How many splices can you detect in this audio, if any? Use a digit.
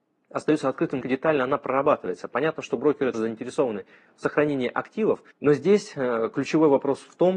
3